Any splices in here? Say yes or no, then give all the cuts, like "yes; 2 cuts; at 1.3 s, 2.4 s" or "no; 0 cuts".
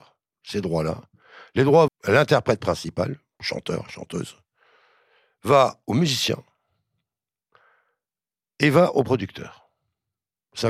yes; 1 cut; at 1.9 s